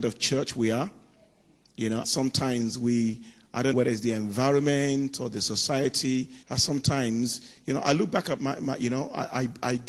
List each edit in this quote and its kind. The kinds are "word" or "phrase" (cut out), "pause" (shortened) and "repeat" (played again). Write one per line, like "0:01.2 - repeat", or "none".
0:02.0 - word
0:03.7 - word
0:06.4 - pause
0:08.4 - word